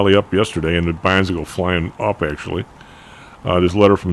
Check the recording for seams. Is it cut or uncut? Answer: uncut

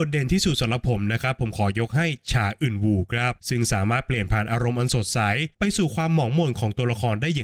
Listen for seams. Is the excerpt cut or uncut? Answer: cut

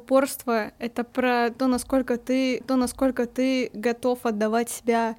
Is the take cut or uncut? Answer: cut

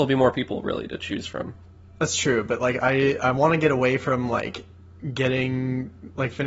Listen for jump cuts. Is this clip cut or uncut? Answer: uncut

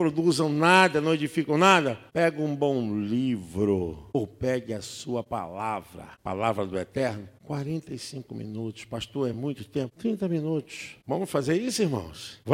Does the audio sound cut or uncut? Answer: uncut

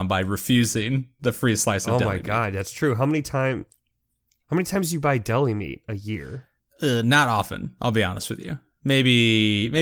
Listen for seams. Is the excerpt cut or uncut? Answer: uncut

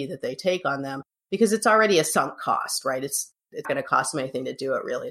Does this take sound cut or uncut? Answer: cut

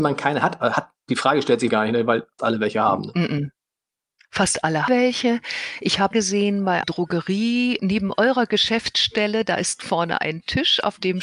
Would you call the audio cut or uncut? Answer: cut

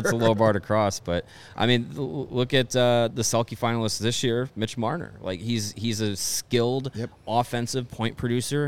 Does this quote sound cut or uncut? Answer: cut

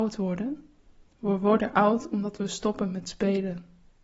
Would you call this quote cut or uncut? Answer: uncut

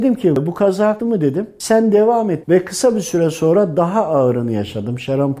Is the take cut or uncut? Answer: cut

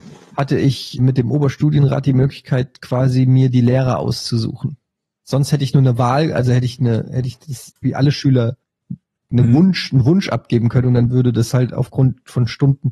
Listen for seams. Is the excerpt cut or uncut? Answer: cut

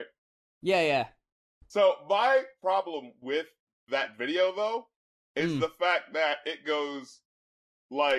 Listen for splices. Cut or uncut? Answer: uncut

